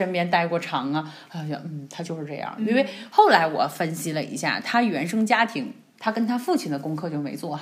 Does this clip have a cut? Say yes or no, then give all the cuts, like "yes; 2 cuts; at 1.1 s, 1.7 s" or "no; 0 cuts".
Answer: no; 0 cuts